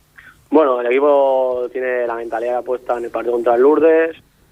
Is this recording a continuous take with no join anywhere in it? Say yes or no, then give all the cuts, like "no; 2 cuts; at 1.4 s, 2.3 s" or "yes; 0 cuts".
yes; 0 cuts